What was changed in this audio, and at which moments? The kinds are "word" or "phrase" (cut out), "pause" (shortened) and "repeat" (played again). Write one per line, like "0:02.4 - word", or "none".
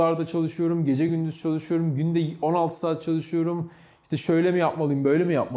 none